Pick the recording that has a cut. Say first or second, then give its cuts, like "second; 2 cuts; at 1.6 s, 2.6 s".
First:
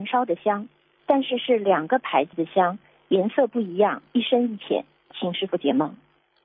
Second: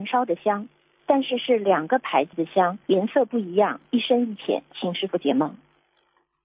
second; 2 cuts; at 2.8 s, 4.7 s